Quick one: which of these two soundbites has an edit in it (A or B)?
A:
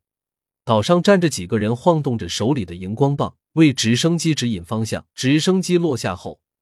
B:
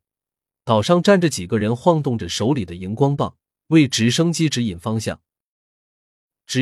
A